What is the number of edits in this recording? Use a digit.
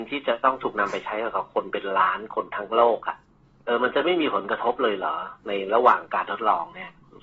1